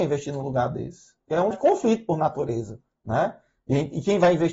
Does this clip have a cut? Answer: yes; 1 cut; at 1.5 s

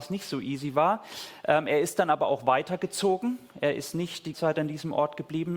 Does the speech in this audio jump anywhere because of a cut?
yes; 1 cut; at 4.3 s

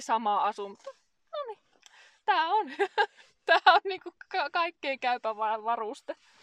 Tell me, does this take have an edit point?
no; 0 cuts

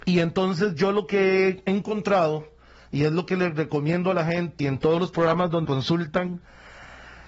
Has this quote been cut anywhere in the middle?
yes; 2 cuts; at 4.6 s, 5.6 s

